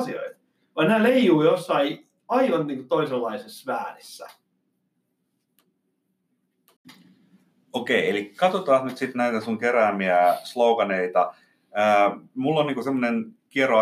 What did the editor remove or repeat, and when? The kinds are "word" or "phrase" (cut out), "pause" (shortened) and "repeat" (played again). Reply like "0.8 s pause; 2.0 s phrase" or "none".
none